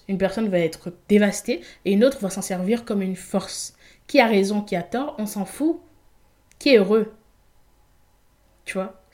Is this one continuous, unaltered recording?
yes; 0 cuts

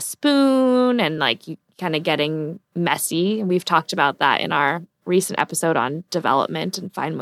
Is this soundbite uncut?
yes; 0 cuts

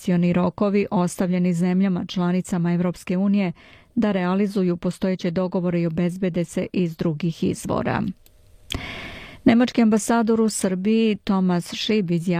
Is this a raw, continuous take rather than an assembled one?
yes; 0 cuts

